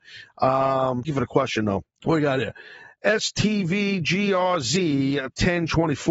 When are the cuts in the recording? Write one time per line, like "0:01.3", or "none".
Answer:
0:01.0
0:01.9